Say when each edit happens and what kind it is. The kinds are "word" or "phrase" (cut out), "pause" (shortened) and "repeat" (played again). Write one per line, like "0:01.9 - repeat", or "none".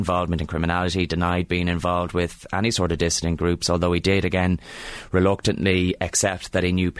none